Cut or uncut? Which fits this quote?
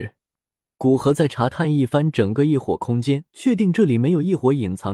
cut